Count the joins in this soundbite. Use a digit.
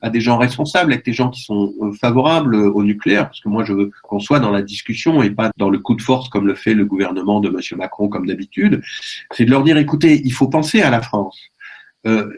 1